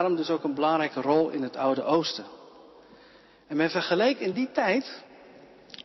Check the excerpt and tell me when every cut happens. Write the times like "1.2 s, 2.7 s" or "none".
none